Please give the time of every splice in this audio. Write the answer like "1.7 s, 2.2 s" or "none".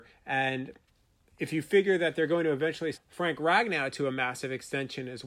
2.9 s